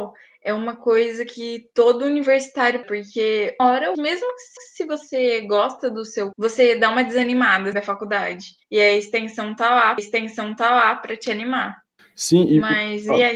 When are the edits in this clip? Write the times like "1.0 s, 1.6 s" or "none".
2.8 s, 3.6 s, 3.9 s, 4.6 s, 6.3 s, 7.7 s, 8.6 s, 10.0 s, 12.0 s

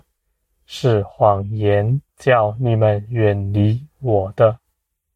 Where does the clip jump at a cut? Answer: 2.1 s

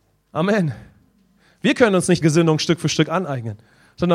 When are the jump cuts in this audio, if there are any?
2.2 s

